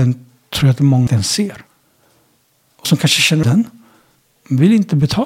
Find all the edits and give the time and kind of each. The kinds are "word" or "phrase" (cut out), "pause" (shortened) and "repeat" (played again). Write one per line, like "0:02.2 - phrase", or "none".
0:01.1 - word
0:02.8 - word
0:03.4 - word